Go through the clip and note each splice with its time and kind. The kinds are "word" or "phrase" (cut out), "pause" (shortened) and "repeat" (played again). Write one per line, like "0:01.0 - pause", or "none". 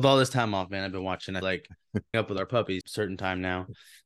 0:01.4 - word
0:02.1 - word
0:02.8 - word